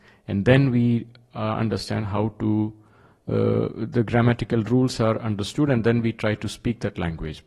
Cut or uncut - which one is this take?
uncut